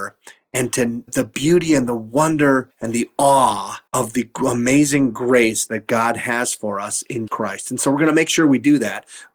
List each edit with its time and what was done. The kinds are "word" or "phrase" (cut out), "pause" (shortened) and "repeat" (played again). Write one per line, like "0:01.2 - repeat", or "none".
0:01.1 - word
0:02.7 - pause
0:03.9 - pause
0:07.3 - word